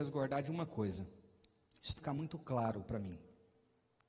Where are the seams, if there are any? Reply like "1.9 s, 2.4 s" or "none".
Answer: 2.0 s